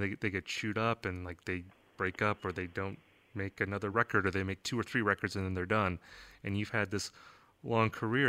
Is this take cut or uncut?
uncut